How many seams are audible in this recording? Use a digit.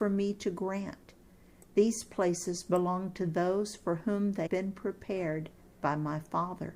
1